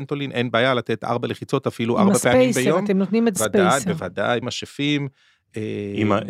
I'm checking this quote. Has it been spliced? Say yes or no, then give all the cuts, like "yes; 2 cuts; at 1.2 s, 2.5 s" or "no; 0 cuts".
yes; 2 cuts; at 3.4 s, 4.4 s